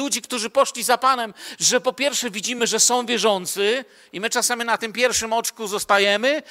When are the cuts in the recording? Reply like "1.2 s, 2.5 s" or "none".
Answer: none